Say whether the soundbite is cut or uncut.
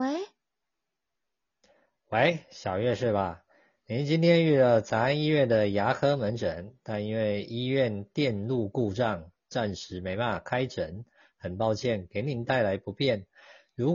uncut